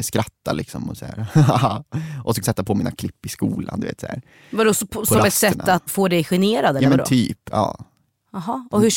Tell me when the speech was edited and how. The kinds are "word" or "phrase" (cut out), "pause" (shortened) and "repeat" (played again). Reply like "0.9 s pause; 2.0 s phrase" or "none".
2.4 s word; 5.9 s word